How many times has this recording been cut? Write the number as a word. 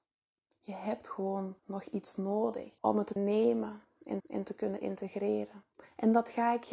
four